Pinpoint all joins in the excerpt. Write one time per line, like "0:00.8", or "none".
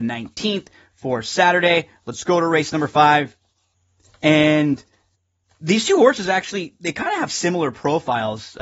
0:05.1